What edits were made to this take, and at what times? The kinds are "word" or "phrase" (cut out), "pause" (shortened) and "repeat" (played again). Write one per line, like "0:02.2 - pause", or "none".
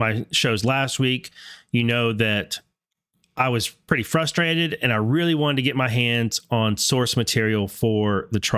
0:03.1 - pause